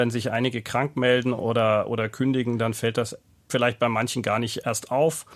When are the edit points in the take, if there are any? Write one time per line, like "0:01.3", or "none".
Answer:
none